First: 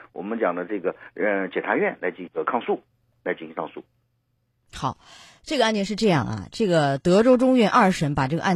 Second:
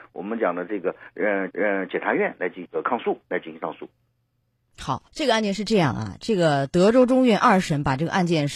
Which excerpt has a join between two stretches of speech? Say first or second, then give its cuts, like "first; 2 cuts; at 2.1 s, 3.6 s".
second; 3 cuts; at 1.5 s, 3.2 s, 5.1 s